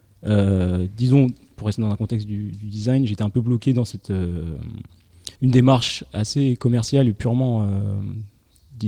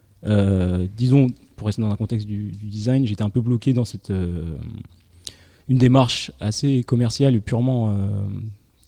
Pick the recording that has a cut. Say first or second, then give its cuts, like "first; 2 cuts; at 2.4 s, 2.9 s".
first; 1 cut; at 5.3 s